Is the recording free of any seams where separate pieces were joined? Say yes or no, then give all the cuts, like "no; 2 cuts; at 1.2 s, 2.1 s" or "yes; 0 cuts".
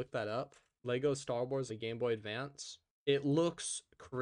no; 1 cut; at 1.7 s